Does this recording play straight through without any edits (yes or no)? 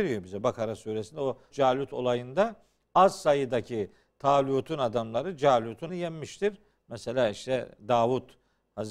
no